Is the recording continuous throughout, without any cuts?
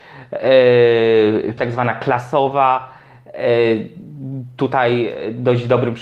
no; 1 cut; at 1.6 s

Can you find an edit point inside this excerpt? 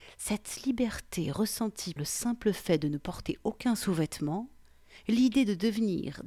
yes; 1 cut; at 2.0 s

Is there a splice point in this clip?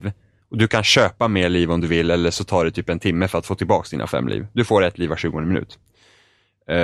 no; 0 cuts

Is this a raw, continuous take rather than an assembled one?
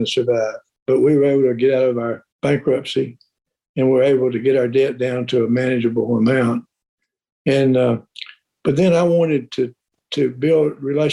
no; 1 cut; at 2.3 s

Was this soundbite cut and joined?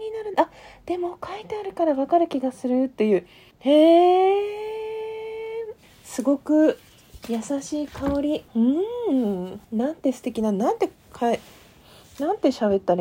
yes; 4 cuts; at 3.5 s, 5.8 s, 8.5 s, 9.6 s

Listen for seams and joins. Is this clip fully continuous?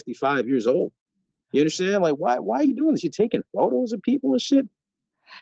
yes; 0 cuts

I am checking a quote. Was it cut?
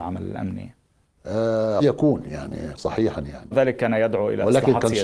yes; 3 cuts; at 1.8 s, 2.8 s, 3.5 s

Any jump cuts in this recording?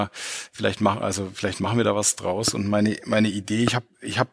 no; 0 cuts

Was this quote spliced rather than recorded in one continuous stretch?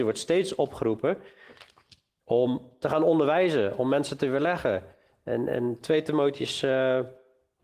no; 0 cuts

